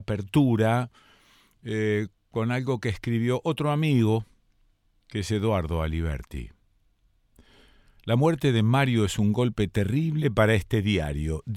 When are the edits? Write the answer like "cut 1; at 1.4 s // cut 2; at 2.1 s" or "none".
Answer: none